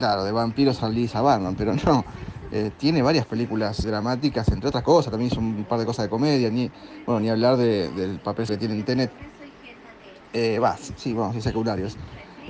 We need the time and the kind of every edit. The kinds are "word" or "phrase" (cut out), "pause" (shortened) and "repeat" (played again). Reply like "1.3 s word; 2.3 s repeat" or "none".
3.8 s word; 8.5 s word